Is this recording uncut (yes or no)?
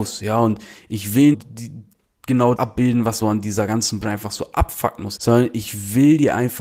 no